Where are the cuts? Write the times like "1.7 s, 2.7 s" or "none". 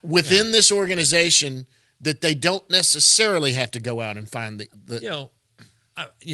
none